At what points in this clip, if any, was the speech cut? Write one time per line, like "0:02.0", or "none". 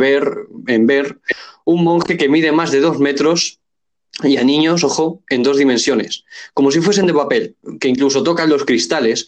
none